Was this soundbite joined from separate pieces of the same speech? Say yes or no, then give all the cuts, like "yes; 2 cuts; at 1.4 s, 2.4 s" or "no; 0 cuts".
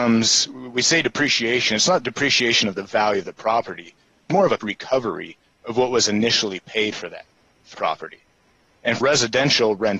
yes; 4 cuts; at 4.3 s, 4.6 s, 7.7 s, 9.0 s